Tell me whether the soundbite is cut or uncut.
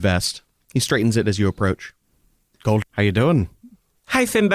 cut